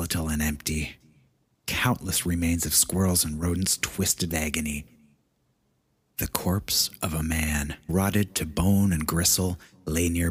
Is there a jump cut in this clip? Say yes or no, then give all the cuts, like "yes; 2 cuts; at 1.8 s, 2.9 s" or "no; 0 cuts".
yes; 2 cuts; at 4.3 s, 7.9 s